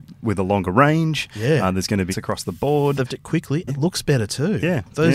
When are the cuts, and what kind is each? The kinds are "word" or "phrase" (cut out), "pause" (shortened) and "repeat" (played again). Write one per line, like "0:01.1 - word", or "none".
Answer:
0:02.1 - word
0:03.1 - word
0:03.7 - word